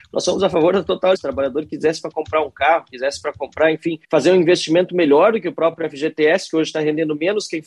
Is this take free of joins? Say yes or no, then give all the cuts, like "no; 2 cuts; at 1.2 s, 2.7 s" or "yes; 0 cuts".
no; 2 cuts; at 1.2 s, 4.0 s